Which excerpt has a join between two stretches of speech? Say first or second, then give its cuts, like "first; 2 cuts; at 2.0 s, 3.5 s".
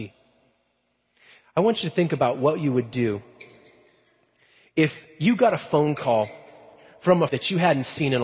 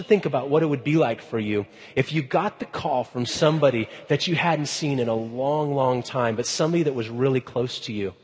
first; 1 cut; at 7.3 s